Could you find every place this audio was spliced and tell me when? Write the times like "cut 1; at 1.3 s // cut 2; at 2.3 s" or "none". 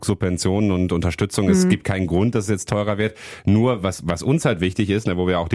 none